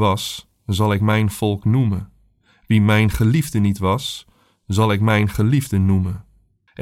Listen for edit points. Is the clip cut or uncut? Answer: uncut